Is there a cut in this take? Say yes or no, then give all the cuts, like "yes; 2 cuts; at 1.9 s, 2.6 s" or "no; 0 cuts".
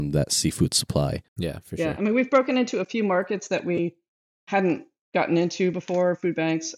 no; 0 cuts